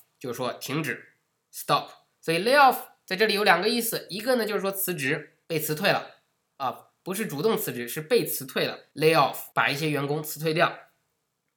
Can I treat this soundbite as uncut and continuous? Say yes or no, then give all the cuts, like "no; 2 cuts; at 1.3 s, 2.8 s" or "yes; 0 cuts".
no; 3 cuts; at 5.4 s, 8.9 s, 9.5 s